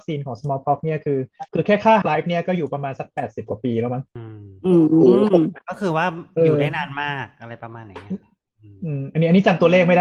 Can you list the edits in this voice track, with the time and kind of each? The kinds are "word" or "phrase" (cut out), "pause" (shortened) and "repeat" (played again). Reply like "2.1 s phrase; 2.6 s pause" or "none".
1.5 s pause; 2.0 s word; 4.1 s pause